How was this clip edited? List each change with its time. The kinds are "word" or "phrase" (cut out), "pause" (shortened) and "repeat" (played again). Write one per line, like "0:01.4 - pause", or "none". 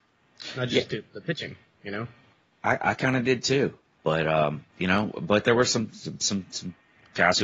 0:03.8 - pause
0:04.7 - pause